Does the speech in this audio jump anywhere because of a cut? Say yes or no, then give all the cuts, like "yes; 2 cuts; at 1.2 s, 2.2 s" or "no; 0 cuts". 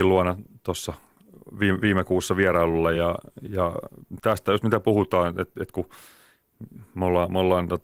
no; 0 cuts